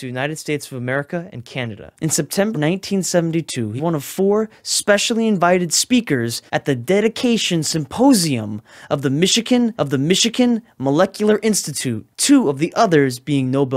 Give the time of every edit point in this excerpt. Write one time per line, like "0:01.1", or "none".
0:02.0
0:02.5
0:03.8
0:06.5
0:09.8
0:12.1

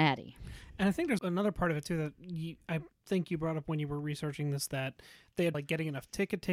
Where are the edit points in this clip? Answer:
0:01.2
0:05.5

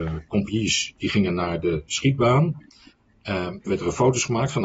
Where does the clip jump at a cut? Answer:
0:03.7

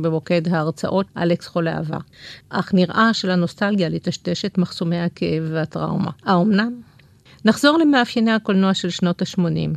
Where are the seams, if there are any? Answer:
0:01.1
0:03.1
0:06.2

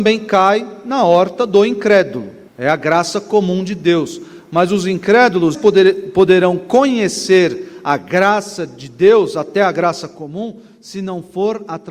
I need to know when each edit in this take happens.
0:02.5
0:05.5

